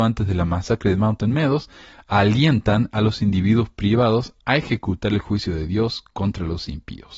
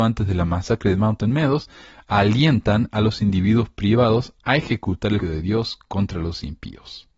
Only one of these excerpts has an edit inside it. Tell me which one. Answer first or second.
second